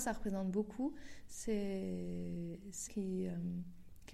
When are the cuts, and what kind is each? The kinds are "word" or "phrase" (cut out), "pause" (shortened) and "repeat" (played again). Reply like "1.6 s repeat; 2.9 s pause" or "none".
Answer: 2.9 s phrase